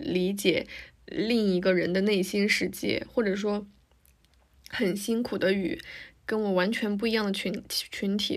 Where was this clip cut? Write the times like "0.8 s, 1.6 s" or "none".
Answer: none